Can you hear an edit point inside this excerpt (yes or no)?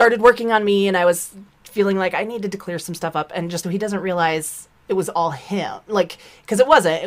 yes